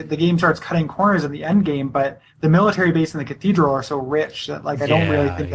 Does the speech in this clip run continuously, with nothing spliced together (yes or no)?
no